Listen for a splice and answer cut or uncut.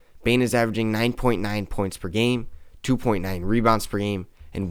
uncut